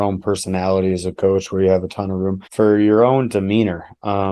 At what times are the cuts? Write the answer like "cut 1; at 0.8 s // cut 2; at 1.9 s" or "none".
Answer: cut 1; at 2.5 s